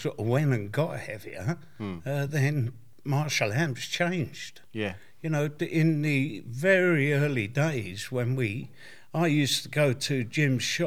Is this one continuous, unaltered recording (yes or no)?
yes